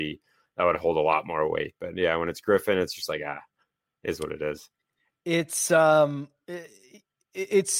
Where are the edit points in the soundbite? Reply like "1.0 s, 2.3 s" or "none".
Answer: none